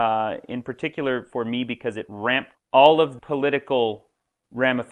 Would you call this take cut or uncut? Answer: cut